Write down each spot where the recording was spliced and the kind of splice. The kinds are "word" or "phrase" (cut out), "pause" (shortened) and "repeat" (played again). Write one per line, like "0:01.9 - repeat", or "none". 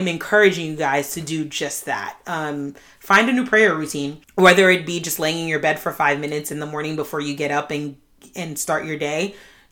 0:04.2 - pause